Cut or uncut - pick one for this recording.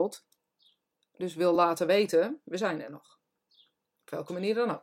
uncut